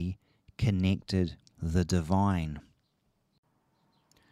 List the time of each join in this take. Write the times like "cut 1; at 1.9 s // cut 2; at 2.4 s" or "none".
cut 1; at 1.5 s